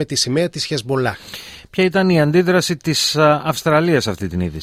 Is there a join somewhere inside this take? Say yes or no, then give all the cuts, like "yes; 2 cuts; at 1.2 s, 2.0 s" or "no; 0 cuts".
no; 0 cuts